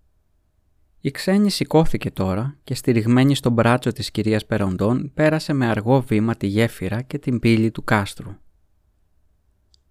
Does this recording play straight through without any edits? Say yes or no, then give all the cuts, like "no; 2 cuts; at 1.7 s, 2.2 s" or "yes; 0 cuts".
yes; 0 cuts